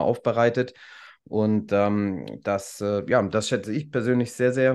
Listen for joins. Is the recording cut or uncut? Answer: uncut